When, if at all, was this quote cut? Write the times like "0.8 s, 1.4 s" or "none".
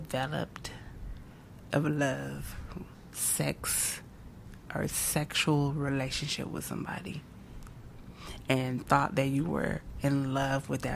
1.7 s, 4.7 s